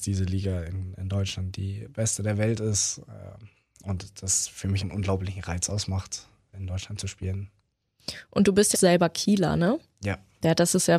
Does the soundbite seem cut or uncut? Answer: cut